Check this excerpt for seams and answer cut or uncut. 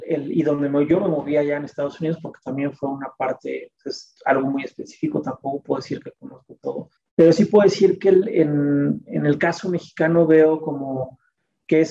cut